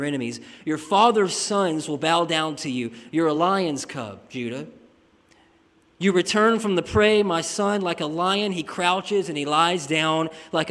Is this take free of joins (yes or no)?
yes